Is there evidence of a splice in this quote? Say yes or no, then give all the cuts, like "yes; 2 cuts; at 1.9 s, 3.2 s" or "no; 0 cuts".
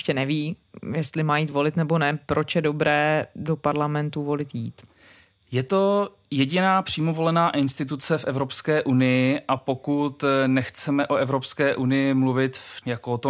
no; 0 cuts